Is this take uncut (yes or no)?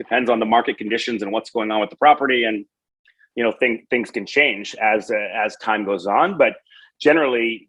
yes